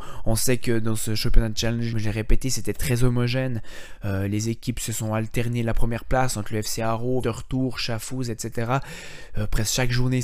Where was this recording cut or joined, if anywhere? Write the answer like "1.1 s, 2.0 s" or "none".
1.9 s, 7.2 s